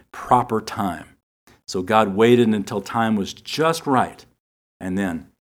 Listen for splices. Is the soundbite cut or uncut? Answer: uncut